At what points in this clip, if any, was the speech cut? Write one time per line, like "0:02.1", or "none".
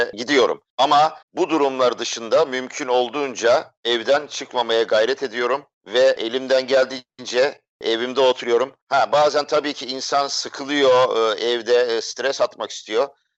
0:01.2
0:03.8
0:08.8